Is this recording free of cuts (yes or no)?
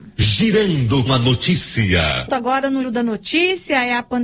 no